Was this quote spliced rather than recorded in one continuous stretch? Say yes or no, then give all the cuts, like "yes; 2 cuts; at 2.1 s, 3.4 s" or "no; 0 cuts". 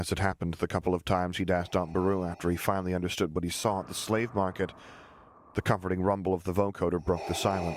no; 0 cuts